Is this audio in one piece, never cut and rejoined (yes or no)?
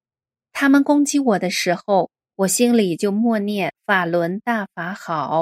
yes